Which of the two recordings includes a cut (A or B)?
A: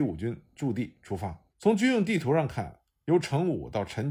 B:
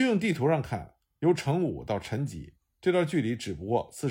A